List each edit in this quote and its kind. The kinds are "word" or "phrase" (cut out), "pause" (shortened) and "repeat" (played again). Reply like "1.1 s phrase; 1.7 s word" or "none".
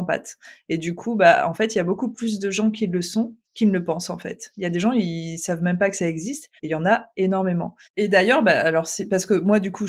3.4 s pause; 6.6 s pause; 7.8 s pause

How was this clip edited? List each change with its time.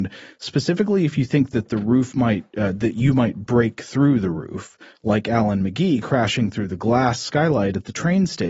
none

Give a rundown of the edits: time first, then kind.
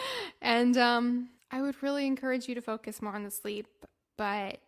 1.4 s pause

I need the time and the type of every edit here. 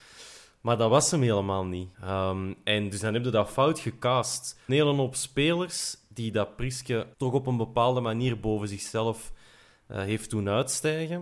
1.9 s pause; 4.7 s phrase; 7.1 s pause

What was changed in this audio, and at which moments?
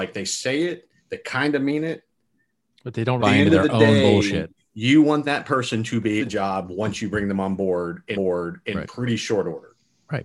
1.0 s pause; 3.2 s word; 6.2 s phrase; 8.1 s repeat

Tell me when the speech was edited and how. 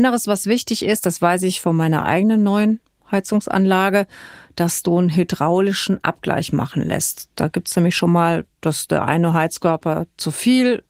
none

